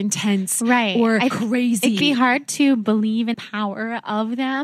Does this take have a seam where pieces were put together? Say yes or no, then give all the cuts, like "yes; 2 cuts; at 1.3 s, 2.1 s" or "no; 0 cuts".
yes; 3 cuts; at 1.3 s, 2.0 s, 3.3 s